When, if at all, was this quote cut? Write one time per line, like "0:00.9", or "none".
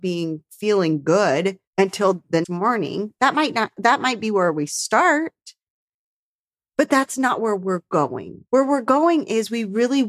0:01.7
0:02.4
0:08.5